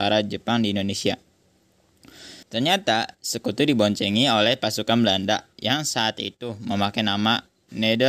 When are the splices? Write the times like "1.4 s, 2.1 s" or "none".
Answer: 2.4 s, 5.5 s